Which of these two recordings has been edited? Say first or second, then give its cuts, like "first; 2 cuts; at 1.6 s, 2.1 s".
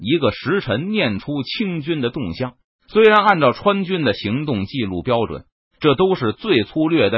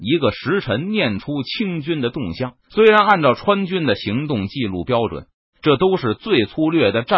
second; 1 cut; at 2.6 s